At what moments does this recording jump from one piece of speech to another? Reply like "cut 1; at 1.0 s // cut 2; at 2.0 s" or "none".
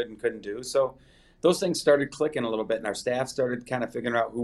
none